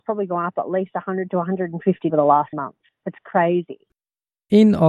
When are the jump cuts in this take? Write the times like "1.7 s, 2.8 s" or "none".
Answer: 2.1 s, 2.5 s